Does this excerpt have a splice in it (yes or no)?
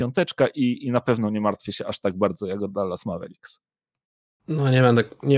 no